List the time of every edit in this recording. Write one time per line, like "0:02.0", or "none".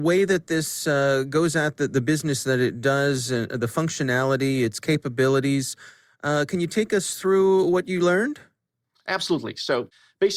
none